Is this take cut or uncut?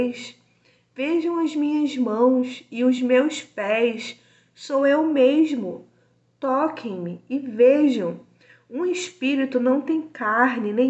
uncut